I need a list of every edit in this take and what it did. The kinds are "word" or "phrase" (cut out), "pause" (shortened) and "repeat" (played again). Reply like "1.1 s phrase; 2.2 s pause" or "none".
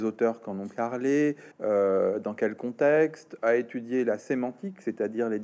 1.5 s pause